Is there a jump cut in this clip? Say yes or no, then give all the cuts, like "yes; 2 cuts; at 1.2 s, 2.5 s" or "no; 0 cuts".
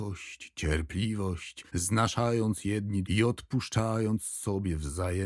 yes; 2 cuts; at 1.7 s, 3.0 s